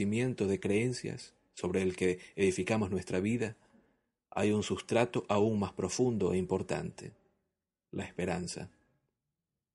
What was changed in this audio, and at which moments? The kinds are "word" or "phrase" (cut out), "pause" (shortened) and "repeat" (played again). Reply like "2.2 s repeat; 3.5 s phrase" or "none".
none